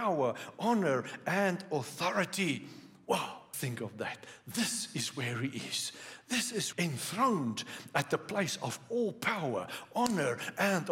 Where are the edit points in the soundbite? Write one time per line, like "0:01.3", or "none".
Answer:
0:03.5
0:06.7